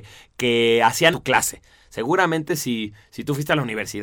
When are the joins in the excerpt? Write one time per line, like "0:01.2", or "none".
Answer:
0:01.1

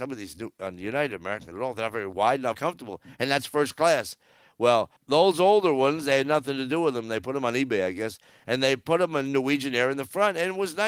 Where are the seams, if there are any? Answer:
0:01.5
0:02.5
0:05.0

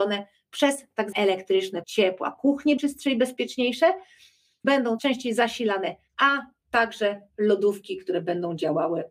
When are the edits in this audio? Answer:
0:01.1
0:01.8
0:02.8
0:04.6
0:05.0
0:06.1

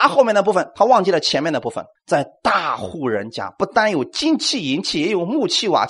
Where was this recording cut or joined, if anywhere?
0:02.0

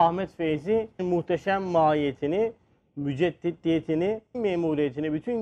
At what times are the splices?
0:01.0
0:04.3

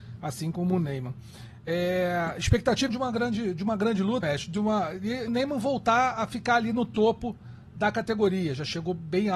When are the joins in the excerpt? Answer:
0:02.9
0:04.2
0:05.3

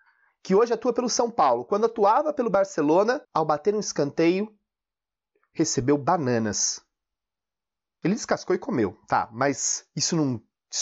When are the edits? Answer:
0:03.2

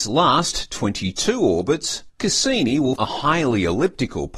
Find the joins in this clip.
0:02.1
0:03.0

